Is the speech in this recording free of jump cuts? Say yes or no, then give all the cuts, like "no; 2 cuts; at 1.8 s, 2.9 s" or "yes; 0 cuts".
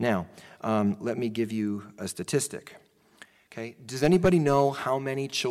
yes; 0 cuts